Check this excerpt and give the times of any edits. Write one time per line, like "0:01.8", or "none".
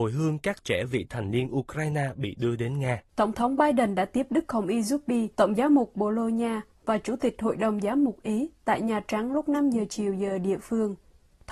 0:03.1
0:05.3

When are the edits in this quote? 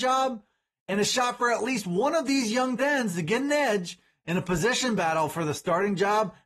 0:02.8

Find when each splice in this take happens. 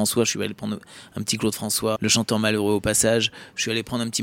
0:02.0

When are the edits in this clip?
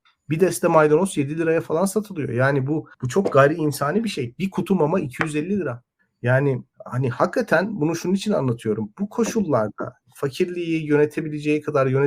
0:02.9
0:06.7
0:10.0

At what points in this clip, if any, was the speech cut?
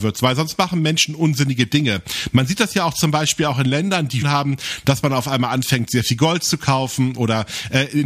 0:04.2

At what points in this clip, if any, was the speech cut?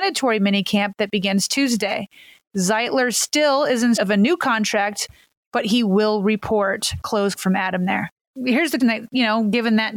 0:04.0
0:07.3
0:08.8

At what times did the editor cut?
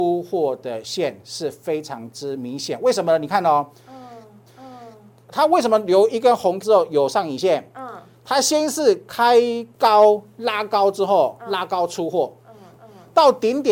0:04.5
0:06.6
0:09.7
0:12.8

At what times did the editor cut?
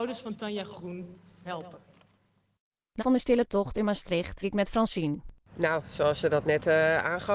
0:01.4
0:03.0
0:04.4

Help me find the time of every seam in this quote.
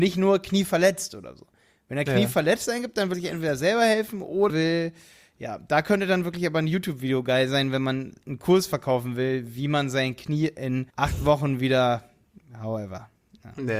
0:03.1
0:04.5
0:10.9

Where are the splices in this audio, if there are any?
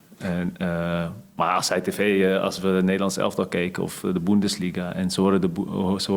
none

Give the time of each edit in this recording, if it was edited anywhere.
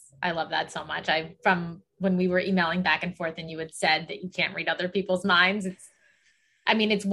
none

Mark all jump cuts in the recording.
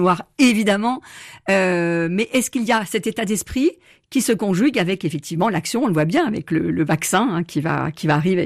none

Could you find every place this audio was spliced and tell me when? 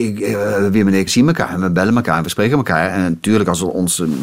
0:01.1

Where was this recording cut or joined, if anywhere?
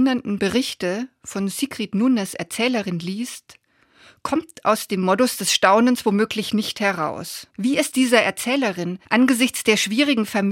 0:07.5
0:07.9
0:09.0

